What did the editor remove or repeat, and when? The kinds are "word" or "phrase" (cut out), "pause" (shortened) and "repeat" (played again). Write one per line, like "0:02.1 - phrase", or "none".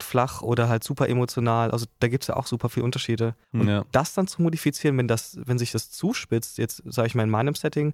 0:03.4 - pause